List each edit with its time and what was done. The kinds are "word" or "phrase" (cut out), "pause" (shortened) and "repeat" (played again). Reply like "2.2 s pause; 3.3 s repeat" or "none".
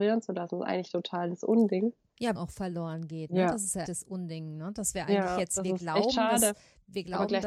2.3 s phrase; 3.8 s word